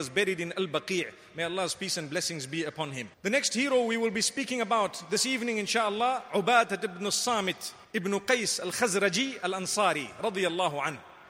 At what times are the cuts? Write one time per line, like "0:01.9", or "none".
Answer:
0:03.1
0:07.8